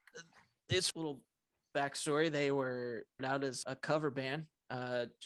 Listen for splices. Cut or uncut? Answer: cut